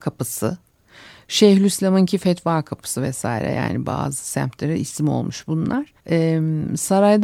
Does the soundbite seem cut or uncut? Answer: cut